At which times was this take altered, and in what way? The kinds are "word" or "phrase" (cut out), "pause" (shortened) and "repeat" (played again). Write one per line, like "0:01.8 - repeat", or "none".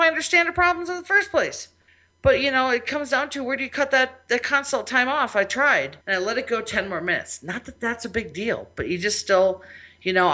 0:01.9 - pause
0:06.0 - pause